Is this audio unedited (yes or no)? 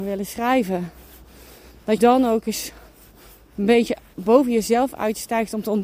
no